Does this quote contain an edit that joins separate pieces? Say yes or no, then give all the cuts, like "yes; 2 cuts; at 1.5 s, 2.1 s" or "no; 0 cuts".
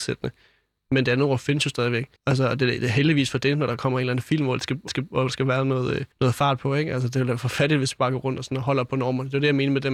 yes; 3 cuts; at 2.2 s, 4.9 s, 6.1 s